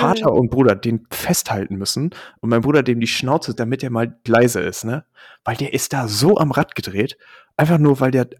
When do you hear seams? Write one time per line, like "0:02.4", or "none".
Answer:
0:01.1
0:03.6
0:04.3